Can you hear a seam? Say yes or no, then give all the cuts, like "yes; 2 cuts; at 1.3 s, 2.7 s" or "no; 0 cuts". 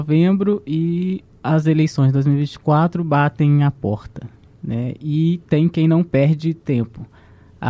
no; 0 cuts